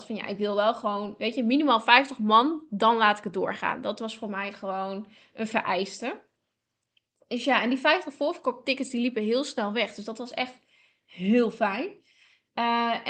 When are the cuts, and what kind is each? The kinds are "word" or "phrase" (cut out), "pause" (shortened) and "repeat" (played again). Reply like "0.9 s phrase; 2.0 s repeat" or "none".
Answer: none